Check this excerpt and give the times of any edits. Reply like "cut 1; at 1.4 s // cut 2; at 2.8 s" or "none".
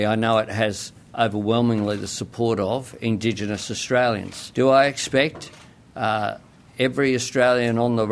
none